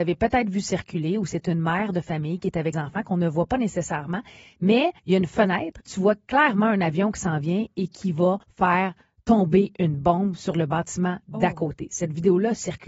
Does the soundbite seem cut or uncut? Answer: cut